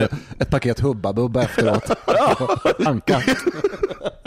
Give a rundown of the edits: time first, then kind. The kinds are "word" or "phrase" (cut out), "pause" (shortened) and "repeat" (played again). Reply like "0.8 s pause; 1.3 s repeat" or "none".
2.9 s phrase

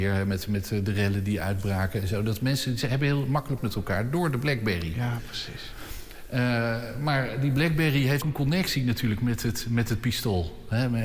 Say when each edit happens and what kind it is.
3.6 s word; 8.2 s word

